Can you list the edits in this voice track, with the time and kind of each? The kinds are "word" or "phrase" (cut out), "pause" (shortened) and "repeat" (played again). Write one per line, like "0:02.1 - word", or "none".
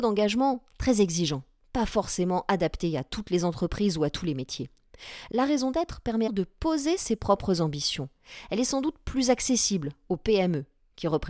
0:06.3 - word